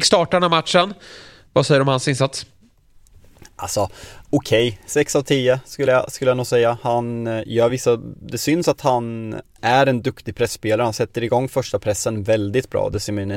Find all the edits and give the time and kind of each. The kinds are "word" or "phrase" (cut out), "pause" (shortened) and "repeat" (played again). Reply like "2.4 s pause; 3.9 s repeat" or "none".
none